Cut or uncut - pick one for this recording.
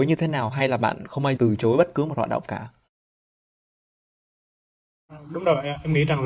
cut